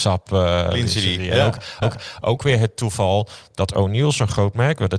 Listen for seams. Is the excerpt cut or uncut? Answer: cut